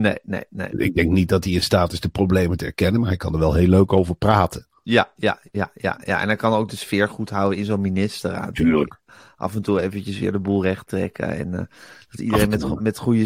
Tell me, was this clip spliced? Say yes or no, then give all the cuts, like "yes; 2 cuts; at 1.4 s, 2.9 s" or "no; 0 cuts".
no; 0 cuts